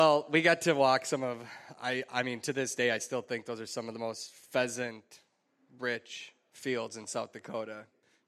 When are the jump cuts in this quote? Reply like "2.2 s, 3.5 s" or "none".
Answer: none